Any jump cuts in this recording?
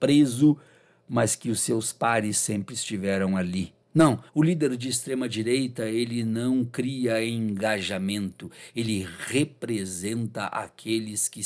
yes; 1 cut; at 4.3 s

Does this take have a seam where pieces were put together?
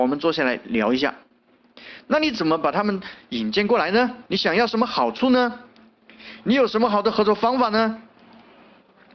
yes; 1 cut; at 4.3 s

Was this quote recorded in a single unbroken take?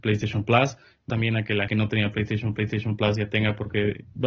no; 3 cuts; at 1.1 s, 1.7 s, 2.6 s

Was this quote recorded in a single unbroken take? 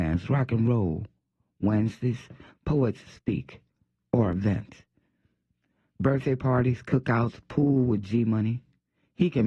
yes; 0 cuts

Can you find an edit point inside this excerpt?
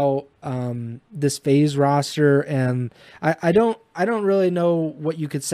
no; 0 cuts

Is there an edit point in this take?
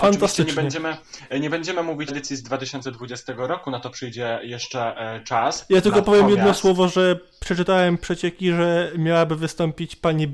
yes; 1 cut; at 2.1 s

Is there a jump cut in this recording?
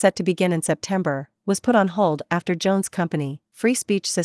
no; 0 cuts

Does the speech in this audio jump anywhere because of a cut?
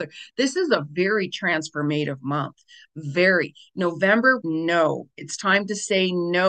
yes; 1 cut; at 4.4 s

